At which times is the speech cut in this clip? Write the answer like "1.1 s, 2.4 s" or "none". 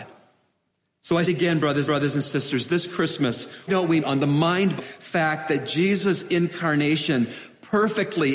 1.3 s, 1.9 s, 3.7 s, 4.0 s, 4.8 s